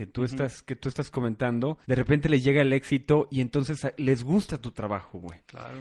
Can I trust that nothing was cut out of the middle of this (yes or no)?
no